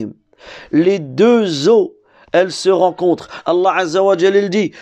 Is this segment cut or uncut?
uncut